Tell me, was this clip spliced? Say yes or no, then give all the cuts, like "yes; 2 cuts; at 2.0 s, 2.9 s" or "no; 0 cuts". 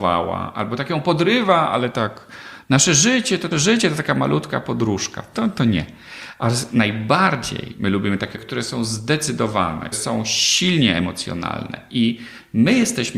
yes; 3 cuts; at 3.5 s, 8.3 s, 9.9 s